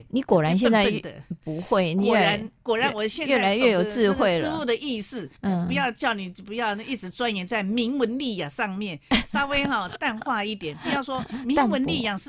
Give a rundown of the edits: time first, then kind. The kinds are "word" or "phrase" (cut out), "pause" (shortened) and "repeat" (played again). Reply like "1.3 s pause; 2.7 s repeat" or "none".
5.4 s pause